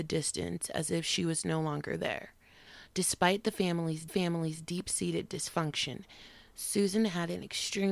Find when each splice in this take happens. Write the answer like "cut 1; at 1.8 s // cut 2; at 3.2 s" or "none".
cut 1; at 4.1 s